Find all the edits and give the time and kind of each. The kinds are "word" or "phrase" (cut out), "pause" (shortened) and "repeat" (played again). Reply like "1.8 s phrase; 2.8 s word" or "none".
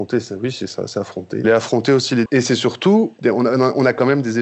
1.4 s word; 2.3 s word